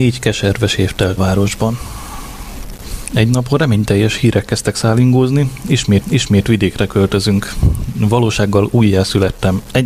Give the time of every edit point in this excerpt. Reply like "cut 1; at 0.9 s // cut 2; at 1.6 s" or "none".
cut 1; at 1.2 s // cut 2; at 6.0 s